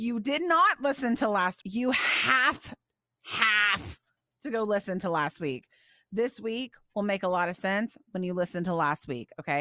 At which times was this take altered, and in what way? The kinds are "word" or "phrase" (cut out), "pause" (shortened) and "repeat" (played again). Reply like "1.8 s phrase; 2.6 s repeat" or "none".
1.6 s word